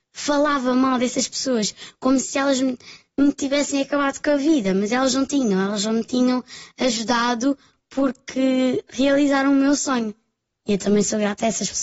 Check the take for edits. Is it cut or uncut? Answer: uncut